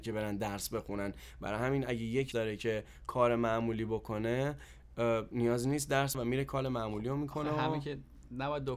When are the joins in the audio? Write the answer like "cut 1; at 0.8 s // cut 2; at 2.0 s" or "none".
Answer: cut 1; at 2.3 s // cut 2; at 6.1 s